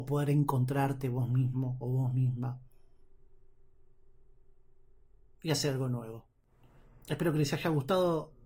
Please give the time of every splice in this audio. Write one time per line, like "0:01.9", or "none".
none